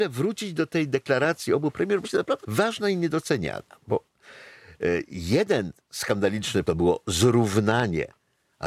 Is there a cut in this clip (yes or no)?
yes